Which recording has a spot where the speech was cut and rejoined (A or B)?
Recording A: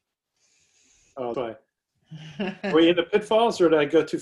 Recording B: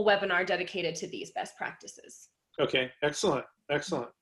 A